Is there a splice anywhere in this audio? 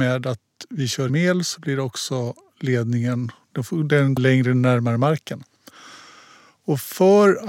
yes; 2 cuts; at 1.1 s, 4.2 s

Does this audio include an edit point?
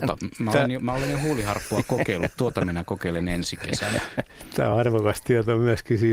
no; 0 cuts

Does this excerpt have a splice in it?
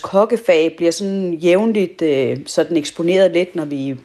no; 0 cuts

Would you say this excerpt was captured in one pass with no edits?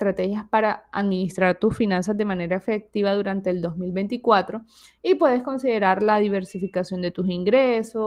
yes; 0 cuts

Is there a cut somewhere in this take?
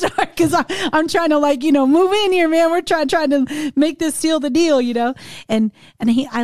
yes; 1 cut; at 3.0 s

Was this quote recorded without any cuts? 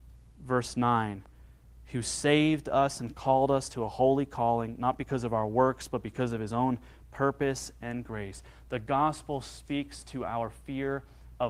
yes; 0 cuts

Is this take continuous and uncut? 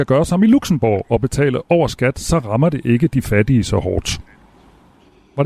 yes; 0 cuts

